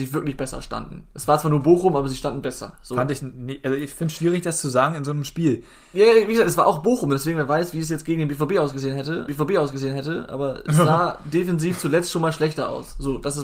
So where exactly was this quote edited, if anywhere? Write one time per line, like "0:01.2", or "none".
0:09.3